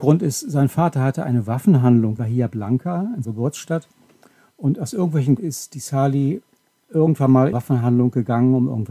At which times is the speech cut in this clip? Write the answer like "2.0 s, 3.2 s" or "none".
2.2 s, 3.2 s, 5.4 s, 7.5 s